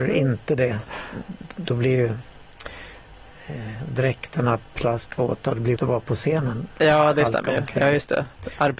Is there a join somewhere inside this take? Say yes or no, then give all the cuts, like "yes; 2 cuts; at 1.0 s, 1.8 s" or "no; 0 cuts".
yes; 1 cut; at 5.8 s